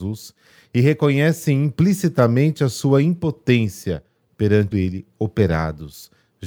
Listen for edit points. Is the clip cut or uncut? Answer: cut